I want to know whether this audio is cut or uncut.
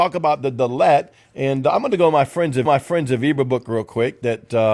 cut